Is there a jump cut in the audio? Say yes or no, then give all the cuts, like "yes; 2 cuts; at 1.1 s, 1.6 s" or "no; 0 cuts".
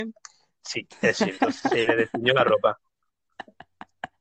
no; 0 cuts